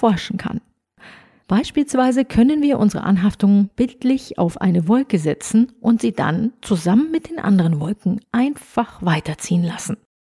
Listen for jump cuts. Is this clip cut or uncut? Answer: uncut